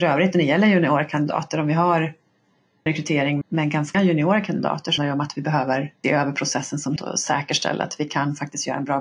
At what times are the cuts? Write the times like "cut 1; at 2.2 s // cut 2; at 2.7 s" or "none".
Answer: cut 1; at 2.9 s // cut 2; at 3.4 s // cut 3; at 3.9 s // cut 4; at 5.0 s // cut 5; at 6.0 s // cut 6; at 7.0 s